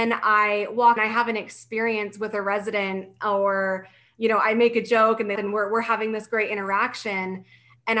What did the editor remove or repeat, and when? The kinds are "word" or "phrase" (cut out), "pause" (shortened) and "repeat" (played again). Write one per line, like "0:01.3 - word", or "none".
0:01.0 - phrase
0:05.4 - word